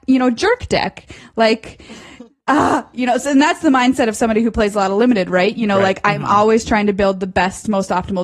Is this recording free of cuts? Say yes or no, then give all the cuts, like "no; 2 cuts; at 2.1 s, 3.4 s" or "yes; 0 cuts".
yes; 0 cuts